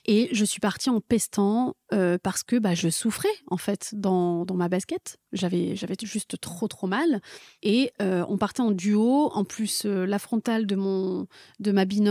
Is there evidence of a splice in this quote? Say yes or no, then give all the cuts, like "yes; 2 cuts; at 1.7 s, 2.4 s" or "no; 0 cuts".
no; 0 cuts